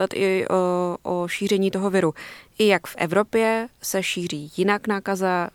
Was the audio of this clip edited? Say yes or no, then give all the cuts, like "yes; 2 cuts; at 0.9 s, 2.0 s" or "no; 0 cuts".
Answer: no; 0 cuts